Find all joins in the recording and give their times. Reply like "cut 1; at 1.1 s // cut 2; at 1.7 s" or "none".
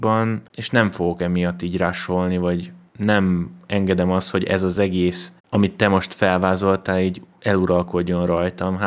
cut 1; at 5.4 s